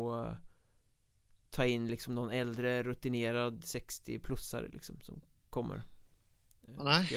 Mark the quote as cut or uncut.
uncut